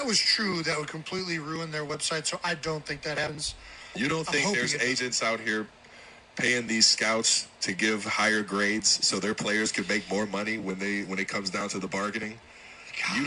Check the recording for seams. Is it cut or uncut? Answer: uncut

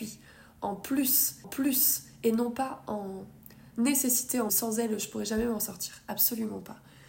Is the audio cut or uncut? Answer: cut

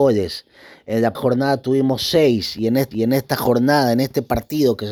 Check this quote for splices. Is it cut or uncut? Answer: cut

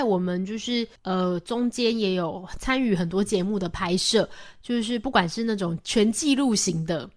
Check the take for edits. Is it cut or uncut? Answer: cut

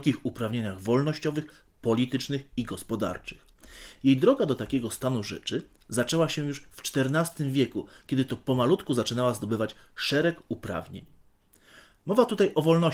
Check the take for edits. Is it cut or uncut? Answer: uncut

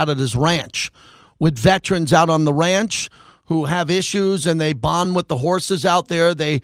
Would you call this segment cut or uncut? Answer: uncut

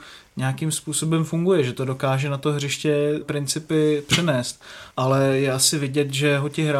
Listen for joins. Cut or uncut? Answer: cut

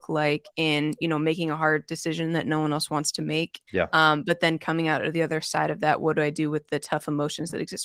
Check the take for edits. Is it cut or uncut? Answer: cut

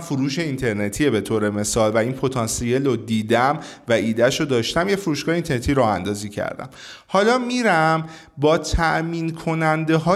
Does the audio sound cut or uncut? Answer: uncut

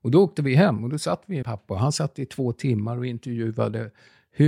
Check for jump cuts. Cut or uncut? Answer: cut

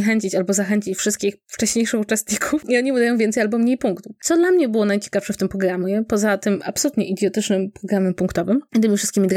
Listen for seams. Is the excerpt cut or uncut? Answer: uncut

